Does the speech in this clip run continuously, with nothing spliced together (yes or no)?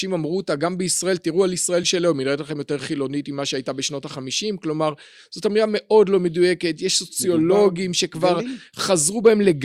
yes